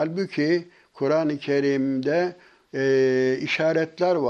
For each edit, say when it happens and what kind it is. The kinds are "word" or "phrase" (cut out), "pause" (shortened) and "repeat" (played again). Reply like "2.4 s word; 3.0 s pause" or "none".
none